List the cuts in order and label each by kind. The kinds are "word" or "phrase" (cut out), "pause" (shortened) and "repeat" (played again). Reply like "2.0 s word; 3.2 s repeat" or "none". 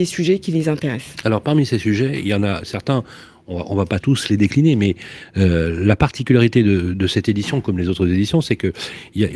4.0 s word